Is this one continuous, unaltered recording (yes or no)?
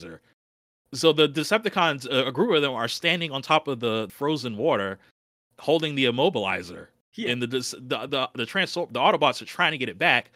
yes